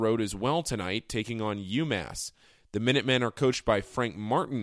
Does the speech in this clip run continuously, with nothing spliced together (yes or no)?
yes